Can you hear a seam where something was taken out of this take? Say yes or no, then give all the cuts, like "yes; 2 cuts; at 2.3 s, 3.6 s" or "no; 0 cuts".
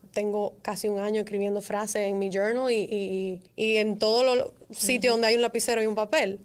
yes; 1 cut; at 3.5 s